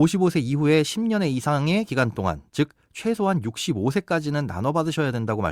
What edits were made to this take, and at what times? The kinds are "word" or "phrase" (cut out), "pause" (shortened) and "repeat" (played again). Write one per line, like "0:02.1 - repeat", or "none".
none